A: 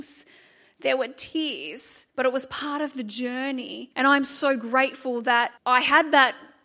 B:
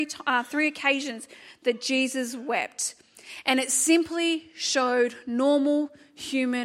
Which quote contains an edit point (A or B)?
A